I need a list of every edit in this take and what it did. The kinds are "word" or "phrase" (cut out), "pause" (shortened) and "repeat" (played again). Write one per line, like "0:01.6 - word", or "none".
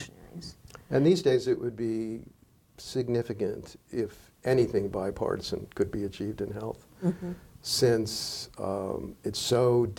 none